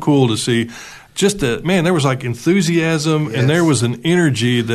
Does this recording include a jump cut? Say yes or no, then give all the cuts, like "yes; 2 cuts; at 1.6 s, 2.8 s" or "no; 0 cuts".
no; 0 cuts